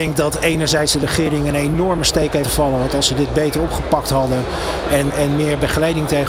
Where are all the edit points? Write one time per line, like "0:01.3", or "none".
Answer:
0:02.4
0:05.1